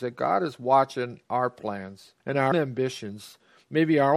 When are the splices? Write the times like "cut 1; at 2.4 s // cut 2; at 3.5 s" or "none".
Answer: cut 1; at 2.2 s // cut 2; at 2.5 s